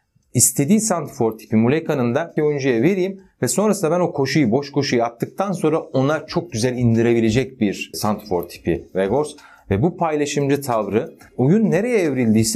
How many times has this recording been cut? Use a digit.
2